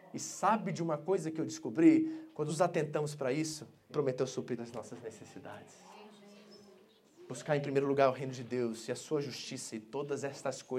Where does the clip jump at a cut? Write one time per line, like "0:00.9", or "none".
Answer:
0:02.5
0:03.9
0:04.6